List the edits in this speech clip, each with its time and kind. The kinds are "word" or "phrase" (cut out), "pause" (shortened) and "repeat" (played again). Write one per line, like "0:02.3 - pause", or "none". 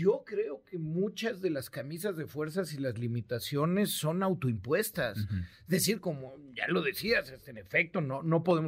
none